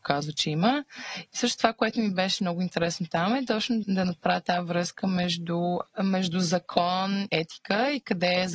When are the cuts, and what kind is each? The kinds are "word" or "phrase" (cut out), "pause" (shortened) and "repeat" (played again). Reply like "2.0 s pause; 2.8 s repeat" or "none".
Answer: 3.8 s word; 5.9 s pause; 7.3 s word